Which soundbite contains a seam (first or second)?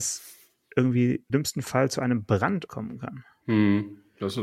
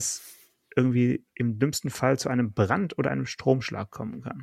first